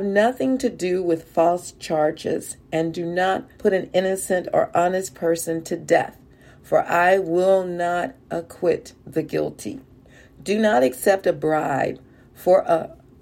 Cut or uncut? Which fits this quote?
cut